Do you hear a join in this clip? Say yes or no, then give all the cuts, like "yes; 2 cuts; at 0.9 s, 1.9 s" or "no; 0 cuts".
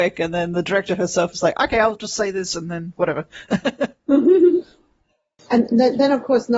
no; 0 cuts